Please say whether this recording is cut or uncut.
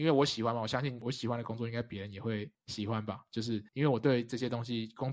cut